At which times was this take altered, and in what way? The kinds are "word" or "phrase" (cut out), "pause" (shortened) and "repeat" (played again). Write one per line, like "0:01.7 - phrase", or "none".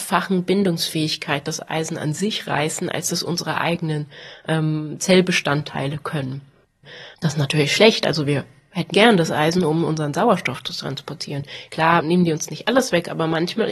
0:08.9 - word